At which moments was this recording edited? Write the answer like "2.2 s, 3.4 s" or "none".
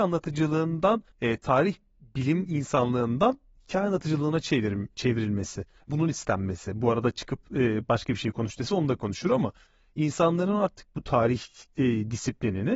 1.1 s, 5.9 s